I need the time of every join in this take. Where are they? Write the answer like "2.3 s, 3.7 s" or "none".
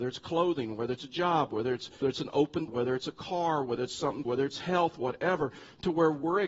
2.0 s, 2.7 s, 4.2 s